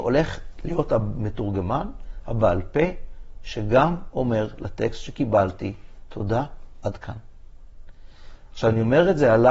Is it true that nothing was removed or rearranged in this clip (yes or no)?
yes